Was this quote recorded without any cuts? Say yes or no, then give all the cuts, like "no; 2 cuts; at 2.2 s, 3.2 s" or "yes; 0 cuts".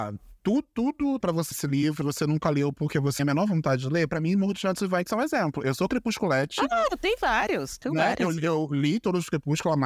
no; 4 cuts; at 1.2 s, 1.5 s, 2.0 s, 3.2 s